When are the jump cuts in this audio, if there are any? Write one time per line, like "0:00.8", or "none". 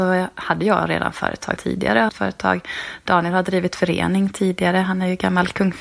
0:01.6
0:02.1